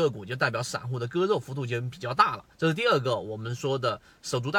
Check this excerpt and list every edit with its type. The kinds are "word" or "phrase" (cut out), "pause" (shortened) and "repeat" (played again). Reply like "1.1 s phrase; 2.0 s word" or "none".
2.5 s pause